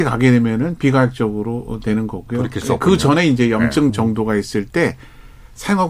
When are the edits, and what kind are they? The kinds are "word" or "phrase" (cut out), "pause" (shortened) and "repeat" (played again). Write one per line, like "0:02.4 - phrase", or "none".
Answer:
0:03.9 - word